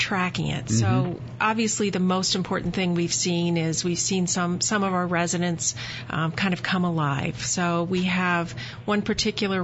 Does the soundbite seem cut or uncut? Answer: uncut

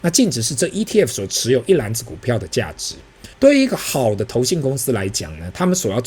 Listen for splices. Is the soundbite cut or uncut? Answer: cut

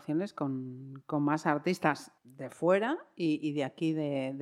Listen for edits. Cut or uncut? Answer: cut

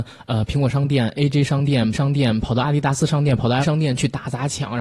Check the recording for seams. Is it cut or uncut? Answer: cut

